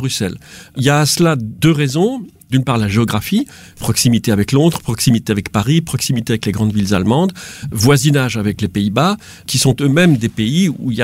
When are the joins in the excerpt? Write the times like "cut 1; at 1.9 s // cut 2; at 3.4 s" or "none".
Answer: none